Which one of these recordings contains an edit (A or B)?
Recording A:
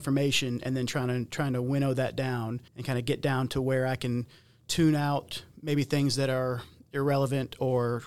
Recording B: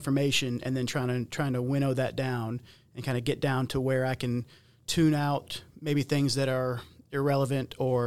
A